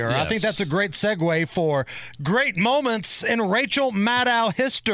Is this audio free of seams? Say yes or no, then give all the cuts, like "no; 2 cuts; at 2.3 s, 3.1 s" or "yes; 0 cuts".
yes; 0 cuts